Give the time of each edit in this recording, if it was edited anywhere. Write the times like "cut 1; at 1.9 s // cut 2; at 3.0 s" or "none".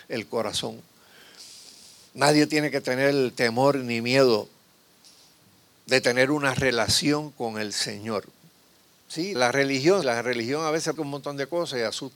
cut 1; at 9.4 s // cut 2; at 10.0 s // cut 3; at 11.0 s